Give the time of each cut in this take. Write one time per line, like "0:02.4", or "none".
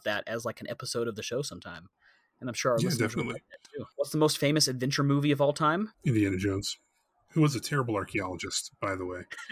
none